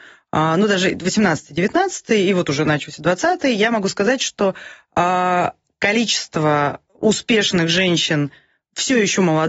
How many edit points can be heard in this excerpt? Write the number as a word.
one